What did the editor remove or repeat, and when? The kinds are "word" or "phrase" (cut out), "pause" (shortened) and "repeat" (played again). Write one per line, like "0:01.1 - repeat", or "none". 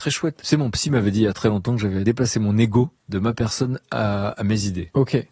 0:03.0 - pause